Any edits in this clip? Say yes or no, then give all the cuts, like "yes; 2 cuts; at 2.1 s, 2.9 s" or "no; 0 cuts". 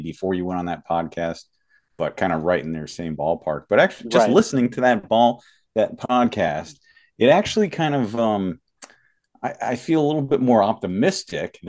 no; 0 cuts